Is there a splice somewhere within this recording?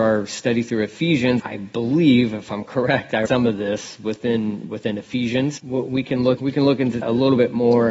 yes; 4 cuts; at 1.4 s, 3.3 s, 6.4 s, 7.0 s

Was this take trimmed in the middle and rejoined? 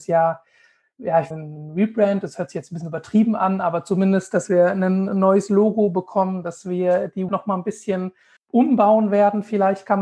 yes; 3 cuts; at 1.3 s, 7.3 s, 8.4 s

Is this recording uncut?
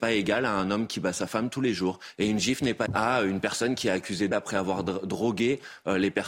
no; 2 cuts; at 2.9 s, 4.3 s

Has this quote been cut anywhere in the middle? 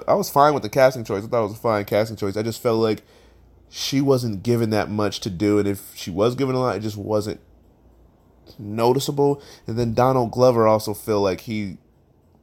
no; 0 cuts

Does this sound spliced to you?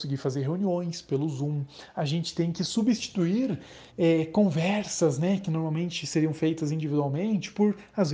yes; 1 cut; at 3.9 s

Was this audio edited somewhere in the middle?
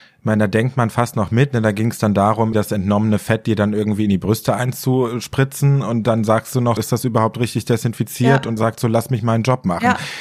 yes; 3 cuts; at 2.5 s, 6.8 s, 8.6 s

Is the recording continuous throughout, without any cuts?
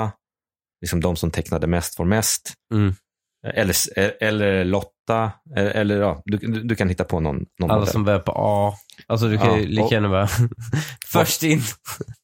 yes; 0 cuts

